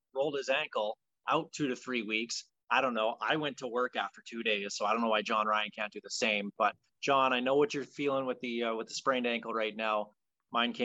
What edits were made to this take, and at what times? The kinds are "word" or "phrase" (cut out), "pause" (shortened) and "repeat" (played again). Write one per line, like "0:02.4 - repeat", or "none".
none